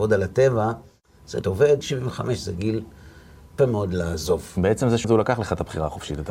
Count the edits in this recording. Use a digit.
4